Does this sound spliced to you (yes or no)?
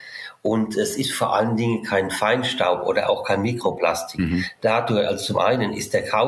no